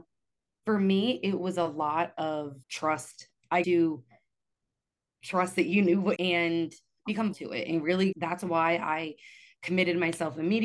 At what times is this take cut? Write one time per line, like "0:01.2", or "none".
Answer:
0:02.6
0:03.6
0:06.2
0:07.3
0:08.1